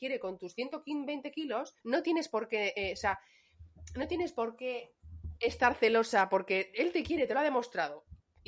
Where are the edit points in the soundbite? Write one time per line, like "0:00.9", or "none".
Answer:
0:01.8